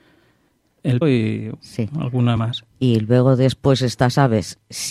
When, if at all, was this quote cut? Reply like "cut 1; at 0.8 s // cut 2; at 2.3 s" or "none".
cut 1; at 1.0 s // cut 2; at 1.6 s // cut 3; at 2.4 s // cut 4; at 2.7 s